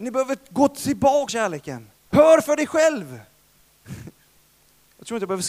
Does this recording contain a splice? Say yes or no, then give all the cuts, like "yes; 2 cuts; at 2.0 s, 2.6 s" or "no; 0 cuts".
yes; 2 cuts; at 1.3 s, 2.0 s